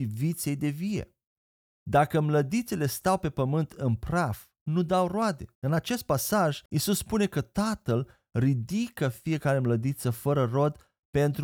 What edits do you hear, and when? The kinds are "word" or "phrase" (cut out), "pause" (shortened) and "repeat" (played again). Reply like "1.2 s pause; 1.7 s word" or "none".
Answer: 5.5 s pause; 6.7 s pause